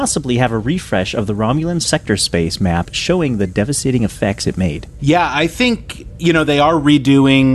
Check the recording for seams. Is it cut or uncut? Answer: uncut